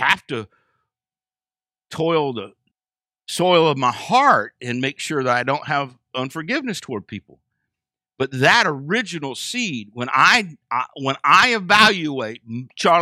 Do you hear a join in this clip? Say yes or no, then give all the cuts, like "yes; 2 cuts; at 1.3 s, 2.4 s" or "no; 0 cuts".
yes; 1 cut; at 2.7 s